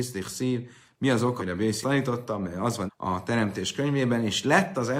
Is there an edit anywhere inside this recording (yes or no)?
yes